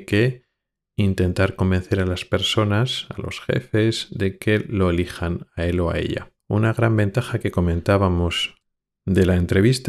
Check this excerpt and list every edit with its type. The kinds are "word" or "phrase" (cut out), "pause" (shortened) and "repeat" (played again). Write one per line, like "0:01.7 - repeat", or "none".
0:06.4 - pause